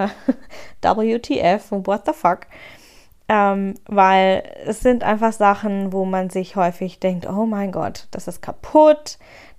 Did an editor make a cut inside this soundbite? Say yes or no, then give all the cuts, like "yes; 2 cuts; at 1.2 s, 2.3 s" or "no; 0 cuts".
no; 0 cuts